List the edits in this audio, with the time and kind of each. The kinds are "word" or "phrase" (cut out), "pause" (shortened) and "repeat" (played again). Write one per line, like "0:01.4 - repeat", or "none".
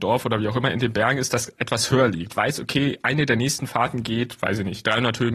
0:02.3 - phrase